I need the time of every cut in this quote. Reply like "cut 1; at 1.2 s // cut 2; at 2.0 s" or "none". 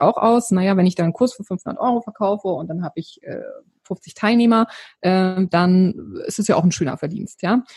cut 1; at 3.7 s